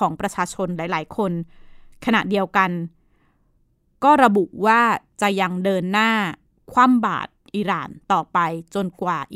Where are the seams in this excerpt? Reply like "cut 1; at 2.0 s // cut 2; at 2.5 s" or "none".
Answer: none